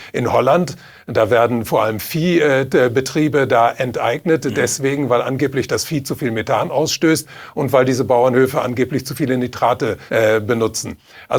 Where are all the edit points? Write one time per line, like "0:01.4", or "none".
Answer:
0:10.1